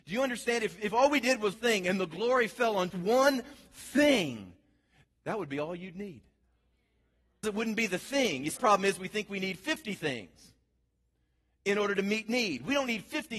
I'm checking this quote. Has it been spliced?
yes; 4 cuts; at 1.5 s, 2.9 s, 7.4 s, 8.6 s

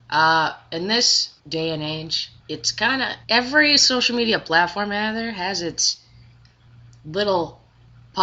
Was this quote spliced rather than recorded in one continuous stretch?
yes; 3 cuts; at 1.4 s, 2.4 s, 3.2 s

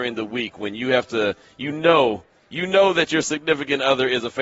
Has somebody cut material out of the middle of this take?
no; 0 cuts

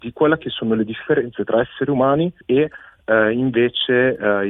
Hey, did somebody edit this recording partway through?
yes; 1 cut; at 2.4 s

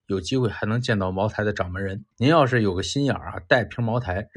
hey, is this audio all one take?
no; 1 cut; at 2.1 s

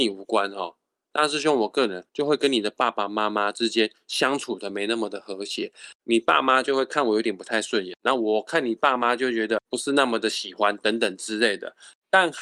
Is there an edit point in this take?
yes; 1 cut; at 2.1 s

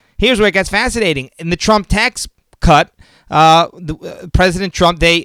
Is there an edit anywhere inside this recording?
no; 0 cuts

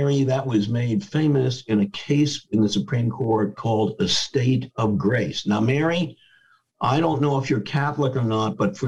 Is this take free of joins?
yes; 0 cuts

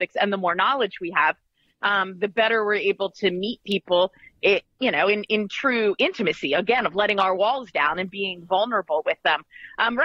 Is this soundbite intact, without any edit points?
yes; 0 cuts

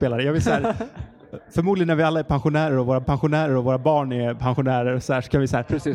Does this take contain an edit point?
yes; 1 cut; at 3.0 s

